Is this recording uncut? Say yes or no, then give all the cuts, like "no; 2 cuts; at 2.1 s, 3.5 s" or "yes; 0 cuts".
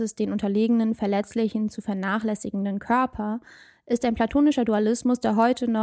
yes; 0 cuts